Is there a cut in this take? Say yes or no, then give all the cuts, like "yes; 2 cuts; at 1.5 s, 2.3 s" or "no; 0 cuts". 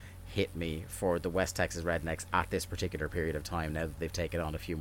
no; 0 cuts